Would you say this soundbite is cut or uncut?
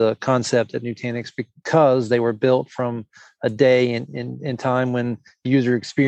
uncut